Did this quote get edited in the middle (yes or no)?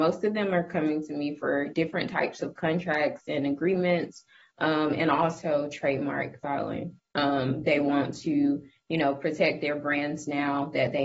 no